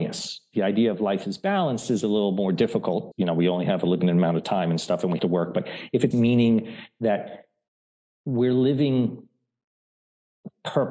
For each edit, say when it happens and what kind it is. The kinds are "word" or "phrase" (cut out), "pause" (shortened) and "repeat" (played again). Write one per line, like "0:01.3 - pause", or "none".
0:03.1 - word
0:05.2 - word
0:06.1 - word
0:07.7 - pause